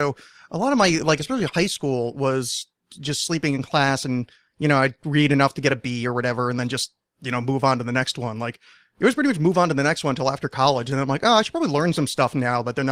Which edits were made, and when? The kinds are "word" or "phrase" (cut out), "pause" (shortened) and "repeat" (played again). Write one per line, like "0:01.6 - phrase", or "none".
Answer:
none